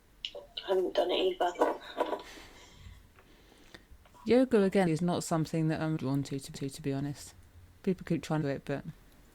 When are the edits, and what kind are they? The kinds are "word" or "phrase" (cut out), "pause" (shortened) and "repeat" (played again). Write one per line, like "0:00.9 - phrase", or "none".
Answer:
0:03.9 - pause
0:04.9 - word
0:06.0 - word
0:06.5 - repeat
0:08.4 - phrase